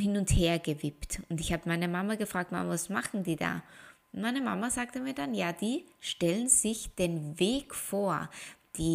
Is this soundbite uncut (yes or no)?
yes